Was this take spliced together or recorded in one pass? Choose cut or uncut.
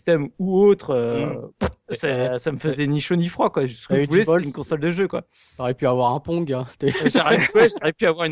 uncut